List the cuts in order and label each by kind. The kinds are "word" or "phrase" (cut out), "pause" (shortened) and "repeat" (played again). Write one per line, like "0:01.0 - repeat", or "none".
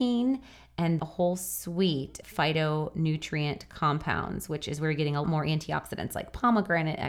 0:01.0 - word
0:02.2 - word
0:05.2 - word

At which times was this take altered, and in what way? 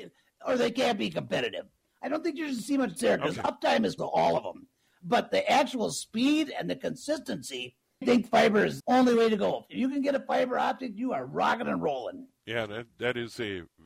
0:03.0 - word
0:04.0 - word
0:08.0 - word
0:08.8 - word

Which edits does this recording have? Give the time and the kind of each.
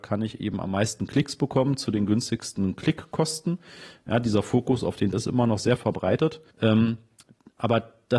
0:05.1 - word
0:06.5 - pause

